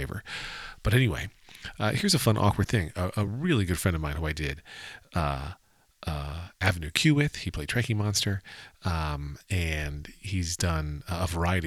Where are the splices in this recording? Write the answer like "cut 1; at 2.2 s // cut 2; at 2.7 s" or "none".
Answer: none